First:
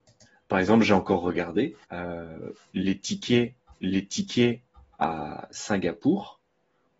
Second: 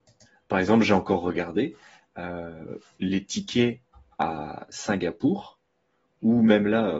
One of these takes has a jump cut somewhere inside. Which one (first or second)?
first